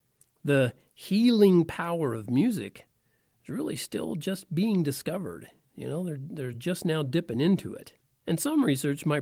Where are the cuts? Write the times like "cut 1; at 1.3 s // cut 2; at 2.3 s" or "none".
none